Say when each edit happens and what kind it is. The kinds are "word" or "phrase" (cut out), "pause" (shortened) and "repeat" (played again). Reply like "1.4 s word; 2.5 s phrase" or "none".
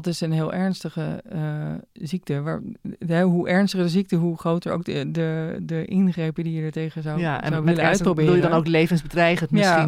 1.9 s pause